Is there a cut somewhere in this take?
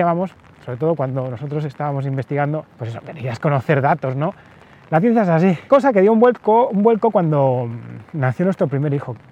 yes; 2 cuts; at 2.7 s, 5.7 s

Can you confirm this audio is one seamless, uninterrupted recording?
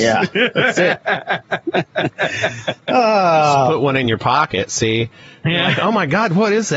yes; 0 cuts

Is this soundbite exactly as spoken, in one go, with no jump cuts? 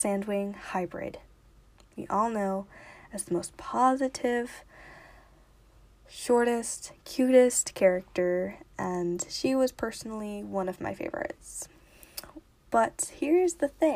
yes; 0 cuts

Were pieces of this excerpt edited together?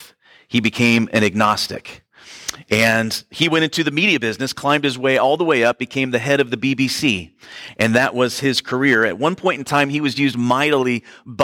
no; 0 cuts

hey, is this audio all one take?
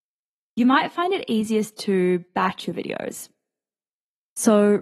yes; 0 cuts

